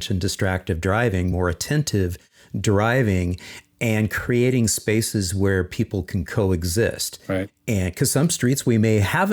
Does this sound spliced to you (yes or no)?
no